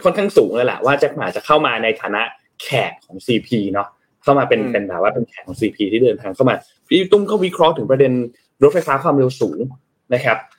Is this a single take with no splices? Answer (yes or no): yes